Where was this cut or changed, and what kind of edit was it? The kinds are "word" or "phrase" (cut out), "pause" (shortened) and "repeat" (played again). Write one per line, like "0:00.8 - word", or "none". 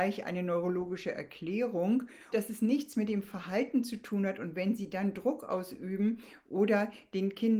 0:02.3 - word